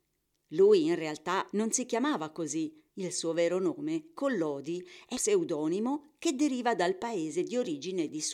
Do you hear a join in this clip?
yes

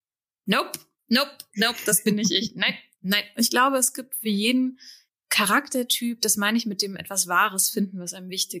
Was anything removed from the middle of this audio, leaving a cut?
no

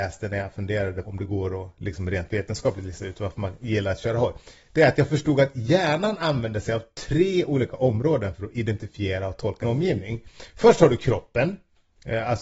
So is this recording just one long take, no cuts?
no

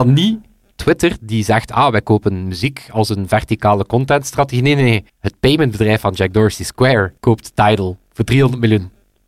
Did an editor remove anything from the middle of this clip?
yes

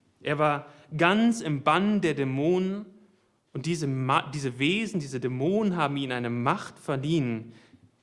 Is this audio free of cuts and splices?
yes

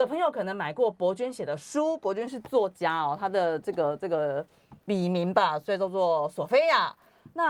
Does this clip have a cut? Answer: yes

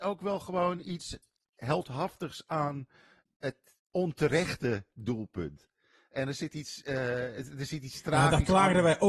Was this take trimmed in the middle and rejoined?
no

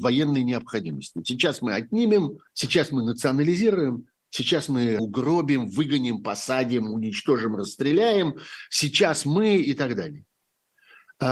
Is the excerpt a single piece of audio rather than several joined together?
no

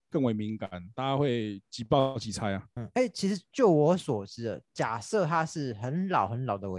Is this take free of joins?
yes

